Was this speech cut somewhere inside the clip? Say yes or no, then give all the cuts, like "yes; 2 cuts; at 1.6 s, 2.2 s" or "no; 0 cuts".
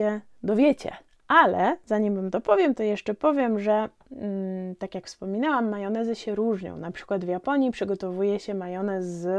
no; 0 cuts